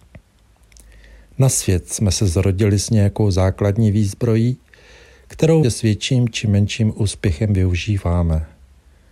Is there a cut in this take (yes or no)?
yes